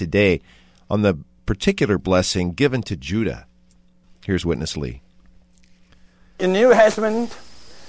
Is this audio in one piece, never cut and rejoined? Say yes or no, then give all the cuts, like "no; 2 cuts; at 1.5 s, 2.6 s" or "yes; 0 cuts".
yes; 0 cuts